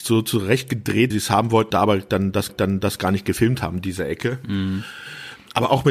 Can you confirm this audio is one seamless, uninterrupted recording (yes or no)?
no